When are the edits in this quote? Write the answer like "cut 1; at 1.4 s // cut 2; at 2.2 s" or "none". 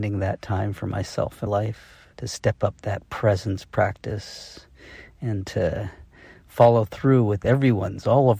cut 1; at 1.5 s // cut 2; at 2.1 s